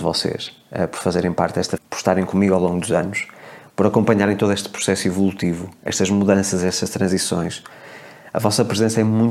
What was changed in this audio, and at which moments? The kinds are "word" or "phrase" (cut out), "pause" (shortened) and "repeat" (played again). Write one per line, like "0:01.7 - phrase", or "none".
0:01.8 - word